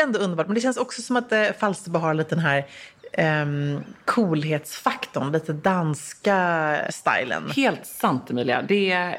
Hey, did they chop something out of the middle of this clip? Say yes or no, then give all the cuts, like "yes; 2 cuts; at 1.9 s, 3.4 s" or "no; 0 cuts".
yes; 1 cut; at 6.9 s